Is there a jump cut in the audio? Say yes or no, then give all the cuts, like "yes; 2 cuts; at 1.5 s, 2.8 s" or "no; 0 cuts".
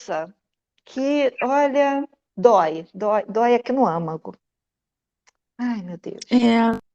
no; 0 cuts